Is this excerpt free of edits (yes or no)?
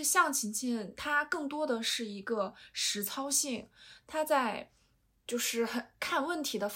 yes